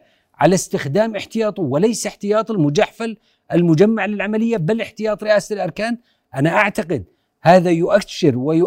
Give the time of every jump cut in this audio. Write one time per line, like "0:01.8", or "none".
none